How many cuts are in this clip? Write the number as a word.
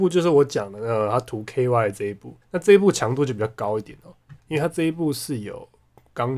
two